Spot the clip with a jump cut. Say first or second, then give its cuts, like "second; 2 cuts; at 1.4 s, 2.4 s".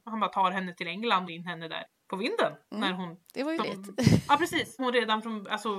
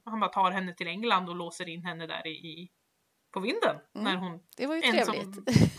first; 4 cuts; at 1.3 s, 1.8 s, 3.6 s, 4.8 s